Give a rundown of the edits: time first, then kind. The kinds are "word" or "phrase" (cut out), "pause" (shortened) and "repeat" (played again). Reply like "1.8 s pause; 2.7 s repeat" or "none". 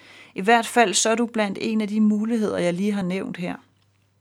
none